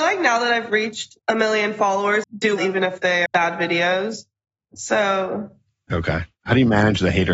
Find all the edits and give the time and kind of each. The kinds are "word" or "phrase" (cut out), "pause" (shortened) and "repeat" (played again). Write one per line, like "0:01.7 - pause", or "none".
0:01.2 - pause
0:02.2 - phrase
0:02.6 - word
0:03.3 - word
0:04.6 - pause